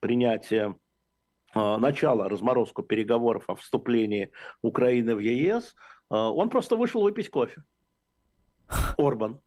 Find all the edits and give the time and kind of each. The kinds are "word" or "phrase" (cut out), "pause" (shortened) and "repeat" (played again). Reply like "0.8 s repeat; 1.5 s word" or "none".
none